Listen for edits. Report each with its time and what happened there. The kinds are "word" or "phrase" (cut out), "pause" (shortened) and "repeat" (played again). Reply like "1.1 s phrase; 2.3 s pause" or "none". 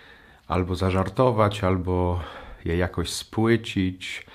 none